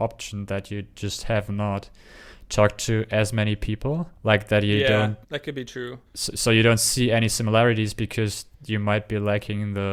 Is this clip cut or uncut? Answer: cut